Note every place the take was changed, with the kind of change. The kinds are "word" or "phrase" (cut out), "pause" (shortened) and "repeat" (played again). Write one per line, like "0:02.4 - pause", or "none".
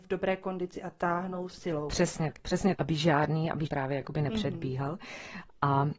0:01.5 - word
0:02.3 - word
0:02.7 - word
0:03.7 - word

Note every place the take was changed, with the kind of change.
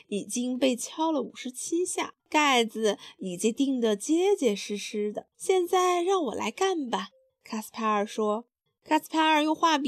0:02.2 - pause
0:05.3 - pause
0:07.3 - pause
0:08.7 - pause

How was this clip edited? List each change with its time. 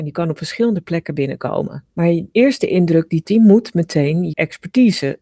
0:02.3 - word
0:03.2 - word
0:04.3 - word

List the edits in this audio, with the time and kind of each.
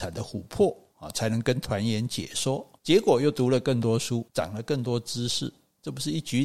0:02.8 - pause
0:04.3 - pause

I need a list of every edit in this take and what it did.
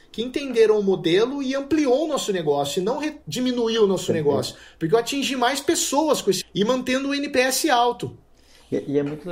0:03.2 - pause
0:06.4 - word

